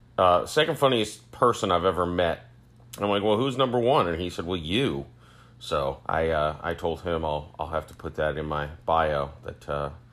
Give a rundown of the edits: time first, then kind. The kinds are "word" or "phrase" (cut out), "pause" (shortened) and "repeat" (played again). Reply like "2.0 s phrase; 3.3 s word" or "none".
2.7 s pause; 6.1 s pause

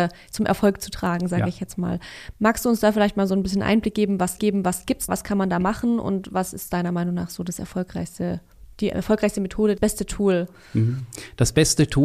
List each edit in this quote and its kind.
4.4 s repeat; 5.1 s word; 9.8 s word

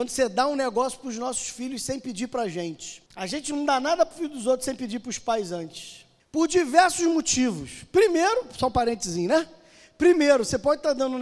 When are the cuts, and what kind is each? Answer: 3.1 s pause; 6.2 s pause

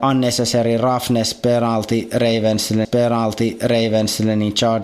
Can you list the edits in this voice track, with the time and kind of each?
2.8 s repeat

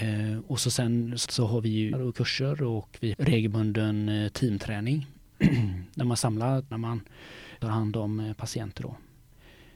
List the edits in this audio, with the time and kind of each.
1.3 s word; 1.9 s word; 3.1 s word; 6.7 s phrase; 7.6 s phrase

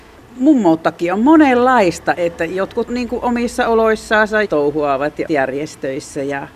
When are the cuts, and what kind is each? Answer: 2.1 s word; 2.9 s phrase; 4.4 s phrase; 5.3 s word

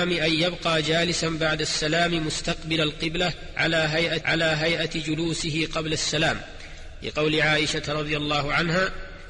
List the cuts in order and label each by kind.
4.2 s repeat

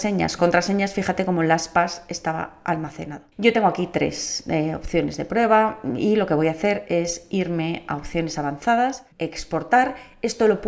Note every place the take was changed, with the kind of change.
3.3 s pause; 9.1 s pause

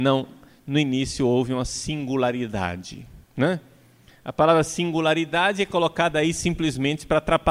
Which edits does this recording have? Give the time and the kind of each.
3.2 s pause

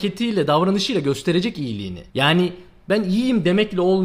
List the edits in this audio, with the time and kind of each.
2.1 s pause

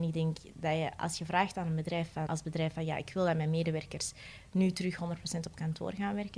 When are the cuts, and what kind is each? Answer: 2.3 s word

